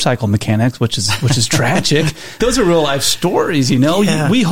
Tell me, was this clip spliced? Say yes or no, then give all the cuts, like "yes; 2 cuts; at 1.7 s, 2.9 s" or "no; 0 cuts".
yes; 1 cut; at 2.4 s